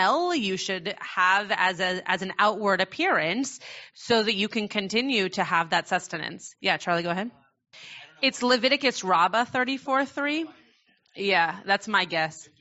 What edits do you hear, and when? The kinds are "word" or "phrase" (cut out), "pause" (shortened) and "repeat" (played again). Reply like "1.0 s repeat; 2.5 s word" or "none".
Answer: none